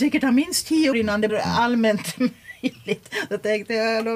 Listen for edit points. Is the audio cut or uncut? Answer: cut